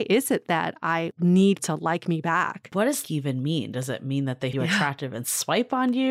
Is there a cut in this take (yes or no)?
yes